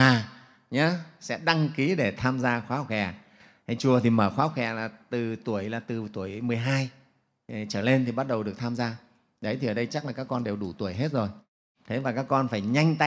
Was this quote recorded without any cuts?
yes; 0 cuts

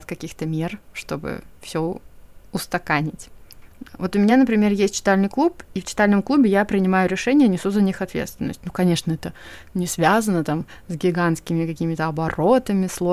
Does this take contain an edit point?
no; 0 cuts

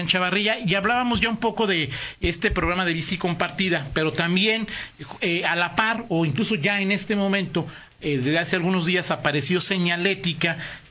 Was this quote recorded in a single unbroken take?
yes; 0 cuts

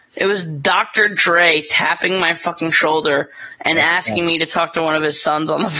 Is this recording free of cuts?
yes; 0 cuts

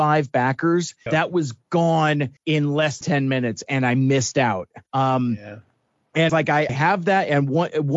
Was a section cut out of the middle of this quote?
yes; 6 cuts; at 1.1 s, 2.4 s, 3.0 s, 4.9 s, 6.3 s, 6.7 s

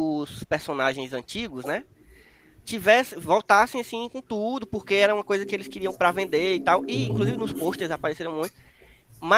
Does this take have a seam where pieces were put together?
no; 0 cuts

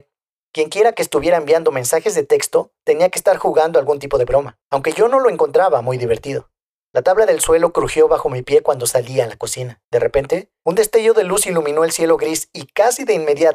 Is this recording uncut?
no; 2 cuts; at 4.6 s, 9.8 s

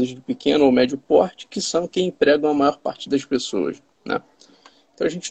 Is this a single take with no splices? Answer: yes; 0 cuts

